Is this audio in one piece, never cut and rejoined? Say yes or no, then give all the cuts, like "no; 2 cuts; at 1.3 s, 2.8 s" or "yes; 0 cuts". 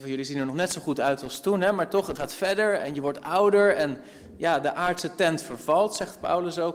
no; 1 cut; at 2.2 s